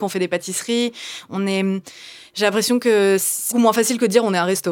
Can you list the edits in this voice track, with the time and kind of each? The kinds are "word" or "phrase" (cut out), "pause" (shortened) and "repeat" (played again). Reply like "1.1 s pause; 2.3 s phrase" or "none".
3.5 s word